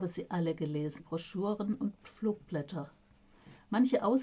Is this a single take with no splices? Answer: no; 1 cut; at 1.0 s

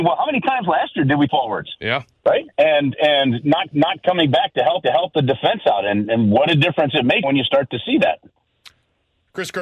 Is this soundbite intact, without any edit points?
no; 5 cuts; at 1.3 s, 2.5 s, 3.7 s, 4.8 s, 7.2 s

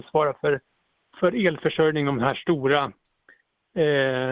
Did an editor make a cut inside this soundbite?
no; 0 cuts

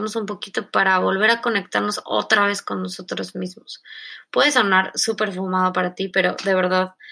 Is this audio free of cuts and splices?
yes; 0 cuts

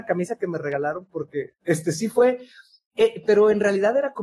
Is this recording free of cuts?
yes; 0 cuts

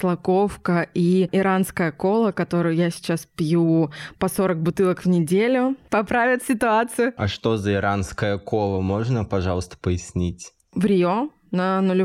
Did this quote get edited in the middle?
no; 0 cuts

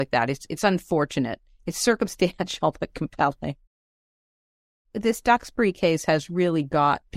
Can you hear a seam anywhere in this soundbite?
no; 0 cuts

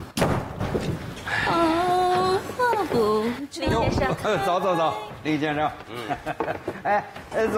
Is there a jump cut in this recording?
no; 0 cuts

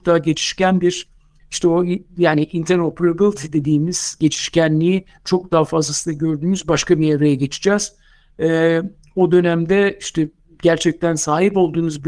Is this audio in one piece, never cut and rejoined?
yes; 0 cuts

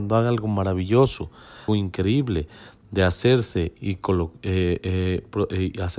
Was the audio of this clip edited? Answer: yes; 1 cut; at 1.7 s

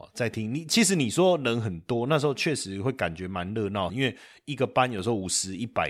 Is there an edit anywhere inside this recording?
yes; 1 cut; at 3.9 s

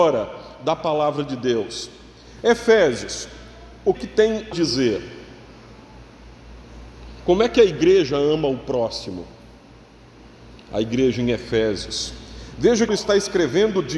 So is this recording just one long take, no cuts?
no; 3 cuts; at 3.9 s, 4.5 s, 12.9 s

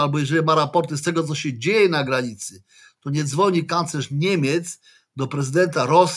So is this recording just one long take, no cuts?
yes; 0 cuts

